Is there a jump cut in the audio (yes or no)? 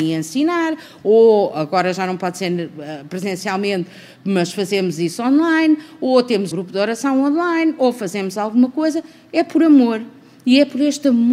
yes